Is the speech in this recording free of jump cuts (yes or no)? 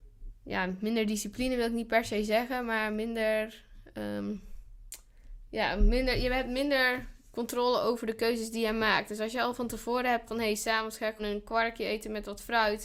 no